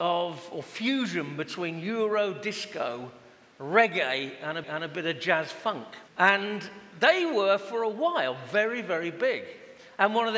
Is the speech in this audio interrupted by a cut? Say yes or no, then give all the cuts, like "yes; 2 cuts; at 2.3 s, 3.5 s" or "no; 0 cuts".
yes; 2 cuts; at 4.6 s, 6.1 s